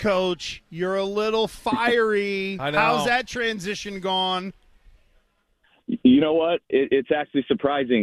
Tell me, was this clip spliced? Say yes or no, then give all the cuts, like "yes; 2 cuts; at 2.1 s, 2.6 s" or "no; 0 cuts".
no; 0 cuts